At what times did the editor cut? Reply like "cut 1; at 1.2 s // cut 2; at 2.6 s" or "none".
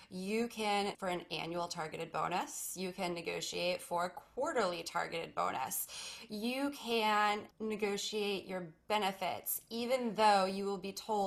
cut 1; at 0.9 s // cut 2; at 7.5 s